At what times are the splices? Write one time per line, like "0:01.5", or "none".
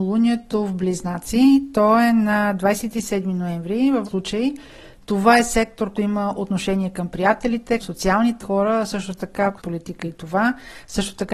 0:04.0
0:05.9
0:07.8
0:08.4
0:09.6